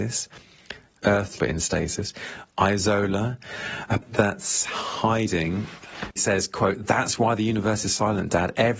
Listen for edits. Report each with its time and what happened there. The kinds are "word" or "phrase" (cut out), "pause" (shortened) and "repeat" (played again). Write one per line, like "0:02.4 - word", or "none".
0:01.0 - word
0:01.4 - word
0:04.0 - word
0:06.2 - word